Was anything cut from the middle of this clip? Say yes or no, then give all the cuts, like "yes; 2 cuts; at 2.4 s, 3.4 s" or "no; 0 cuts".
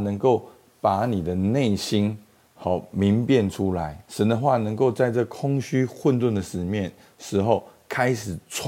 yes; 1 cut; at 4.0 s